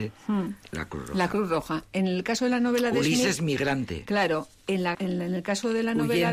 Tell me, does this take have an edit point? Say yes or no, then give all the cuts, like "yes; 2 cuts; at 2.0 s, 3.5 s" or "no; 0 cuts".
yes; 1 cut; at 4.9 s